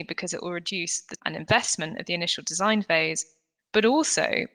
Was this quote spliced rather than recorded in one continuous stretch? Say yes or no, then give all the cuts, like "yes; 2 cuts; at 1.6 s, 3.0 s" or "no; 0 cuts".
yes; 1 cut; at 1.2 s